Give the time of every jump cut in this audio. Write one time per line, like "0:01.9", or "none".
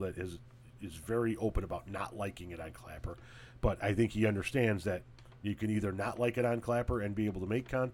none

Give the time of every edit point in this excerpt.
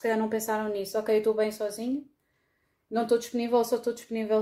none

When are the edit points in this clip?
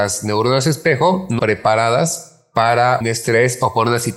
0:01.4
0:03.0

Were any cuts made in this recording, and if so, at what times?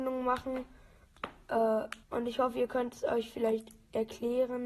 0:02.0

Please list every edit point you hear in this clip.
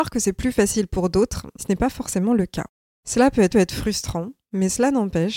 0:01.6
0:02.9
0:03.5

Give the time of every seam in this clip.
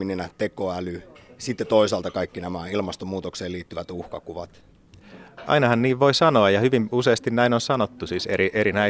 none

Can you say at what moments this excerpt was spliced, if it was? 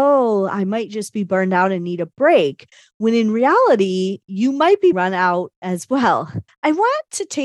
0:04.9
0:06.5

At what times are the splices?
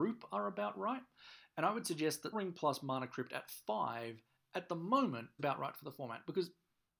0:02.3
0:05.4

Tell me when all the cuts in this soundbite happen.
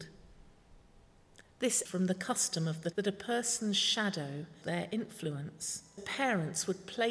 0:01.9
0:02.9
0:04.6
0:06.0

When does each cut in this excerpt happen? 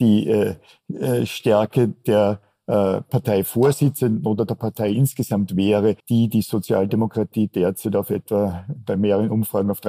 0:06.0

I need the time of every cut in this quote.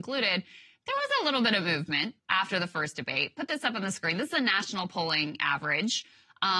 0:02.2

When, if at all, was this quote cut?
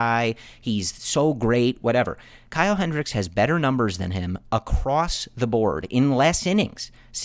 none

